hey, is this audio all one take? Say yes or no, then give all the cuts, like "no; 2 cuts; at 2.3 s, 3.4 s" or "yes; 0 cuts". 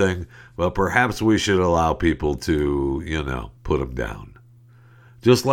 no; 1 cut; at 3.6 s